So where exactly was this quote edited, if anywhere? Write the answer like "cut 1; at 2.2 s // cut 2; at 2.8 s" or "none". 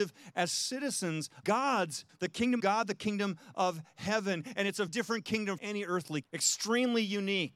cut 1; at 1.4 s // cut 2; at 2.1 s // cut 3; at 2.6 s // cut 4; at 4.9 s // cut 5; at 5.6 s // cut 6; at 6.2 s